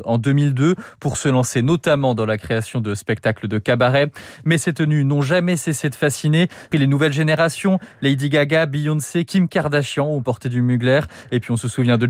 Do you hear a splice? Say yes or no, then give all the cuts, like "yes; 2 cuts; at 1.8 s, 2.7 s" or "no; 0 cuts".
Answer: yes; 1 cut; at 6.7 s